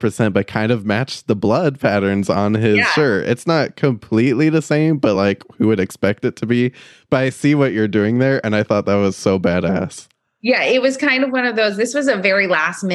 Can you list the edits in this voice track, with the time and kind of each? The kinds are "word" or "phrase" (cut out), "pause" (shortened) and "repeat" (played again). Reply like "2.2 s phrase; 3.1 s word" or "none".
none